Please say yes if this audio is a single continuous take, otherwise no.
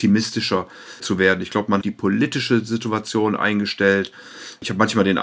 no